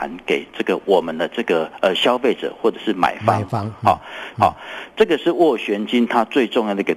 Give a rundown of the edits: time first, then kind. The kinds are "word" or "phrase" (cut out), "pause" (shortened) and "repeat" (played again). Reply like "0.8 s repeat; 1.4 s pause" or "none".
4.3 s repeat